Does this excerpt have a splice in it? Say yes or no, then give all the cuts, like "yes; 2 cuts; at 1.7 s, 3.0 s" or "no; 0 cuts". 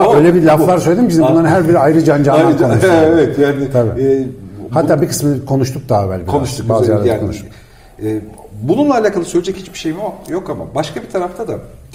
no; 0 cuts